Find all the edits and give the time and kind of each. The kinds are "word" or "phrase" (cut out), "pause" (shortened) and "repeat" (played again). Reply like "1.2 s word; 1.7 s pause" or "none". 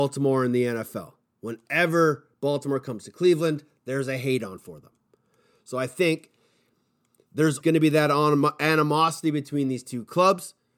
7.6 s word

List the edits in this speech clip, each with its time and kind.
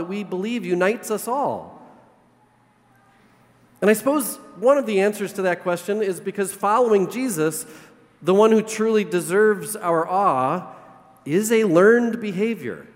none

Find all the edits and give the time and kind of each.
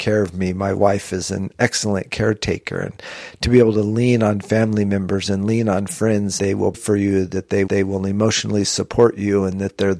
6.4 s phrase; 6.7 s word; 7.7 s repeat

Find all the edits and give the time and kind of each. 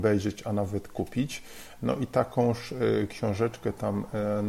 none

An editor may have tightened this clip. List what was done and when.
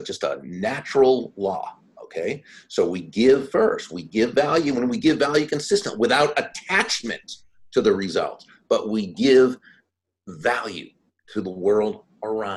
none

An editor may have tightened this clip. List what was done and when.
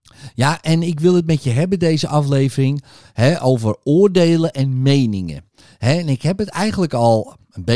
none

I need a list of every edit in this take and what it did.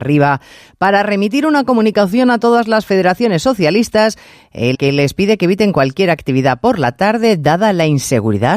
4.7 s word

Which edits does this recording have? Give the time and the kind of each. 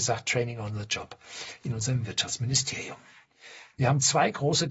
none

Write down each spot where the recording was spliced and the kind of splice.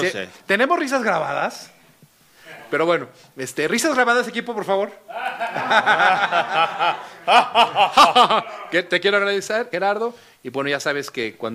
9.7 s word

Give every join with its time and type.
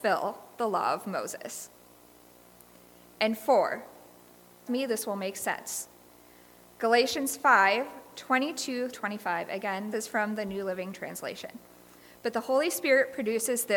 4.7 s word; 8.9 s word; 9.9 s word

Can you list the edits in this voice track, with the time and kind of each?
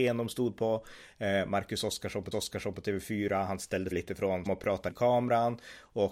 2.3 s repeat; 3.9 s word; 4.5 s phrase; 4.9 s word

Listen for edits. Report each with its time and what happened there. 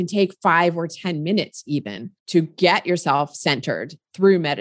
2.2 s pause

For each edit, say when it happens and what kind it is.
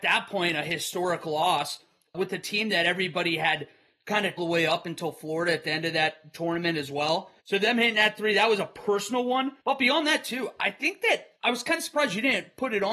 4.4 s phrase; 7.4 s pause; 9.6 s pause; 11.4 s pause

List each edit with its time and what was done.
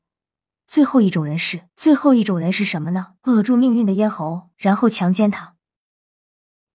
1.7 s pause; 3.2 s pause; 4.5 s pause

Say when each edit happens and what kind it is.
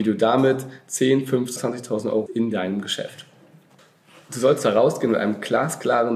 1.6 s word; 2.3 s phrase

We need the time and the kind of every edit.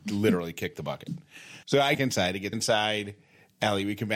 1.6 s pause; 1.9 s phrase; 2.5 s word

